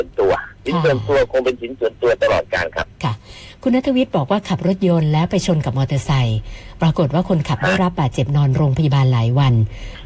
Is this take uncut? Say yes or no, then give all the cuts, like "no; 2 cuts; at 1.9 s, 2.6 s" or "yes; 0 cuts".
no; 1 cut; at 2.9 s